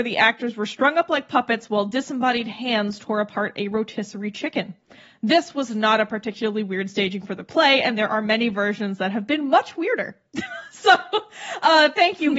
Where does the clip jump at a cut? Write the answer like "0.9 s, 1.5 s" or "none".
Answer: none